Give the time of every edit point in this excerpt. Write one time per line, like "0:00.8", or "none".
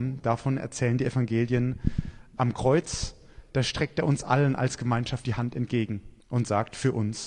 0:06.2